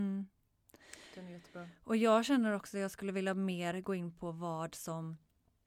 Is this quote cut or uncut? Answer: uncut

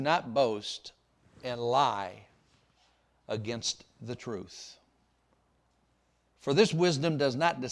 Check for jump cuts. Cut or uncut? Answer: uncut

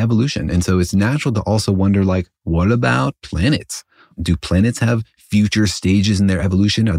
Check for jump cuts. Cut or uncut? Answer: uncut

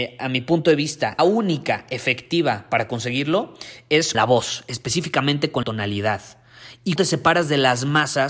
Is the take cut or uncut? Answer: cut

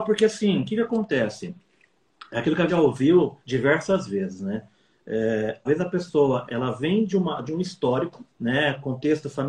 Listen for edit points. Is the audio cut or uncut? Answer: cut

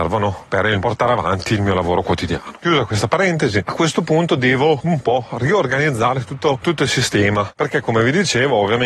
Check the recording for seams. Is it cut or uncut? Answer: uncut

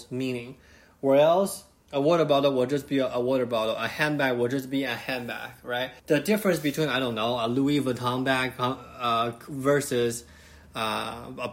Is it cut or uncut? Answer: cut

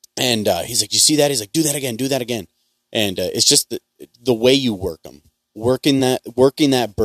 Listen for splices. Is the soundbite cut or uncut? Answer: uncut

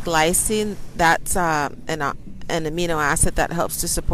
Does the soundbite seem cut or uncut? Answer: uncut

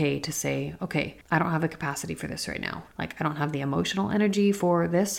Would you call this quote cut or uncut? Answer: cut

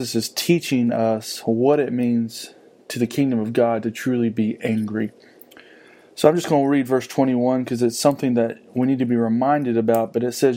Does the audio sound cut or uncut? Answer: uncut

